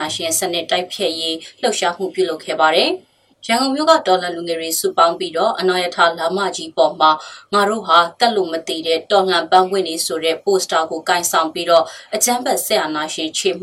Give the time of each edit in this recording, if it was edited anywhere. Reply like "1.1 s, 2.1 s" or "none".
3.3 s